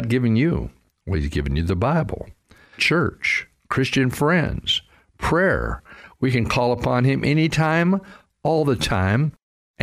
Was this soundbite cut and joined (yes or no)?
yes